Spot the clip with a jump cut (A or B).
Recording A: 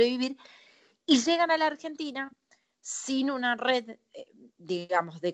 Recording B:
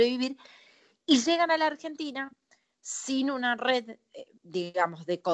B